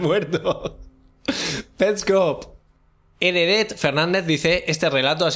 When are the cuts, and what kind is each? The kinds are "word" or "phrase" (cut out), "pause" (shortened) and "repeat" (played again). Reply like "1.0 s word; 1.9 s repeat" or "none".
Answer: none